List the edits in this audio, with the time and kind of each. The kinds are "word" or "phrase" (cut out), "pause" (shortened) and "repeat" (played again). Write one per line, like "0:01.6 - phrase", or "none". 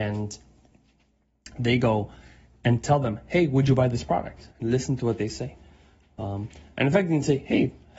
0:04.5 - pause